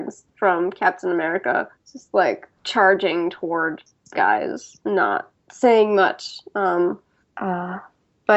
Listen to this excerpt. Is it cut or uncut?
cut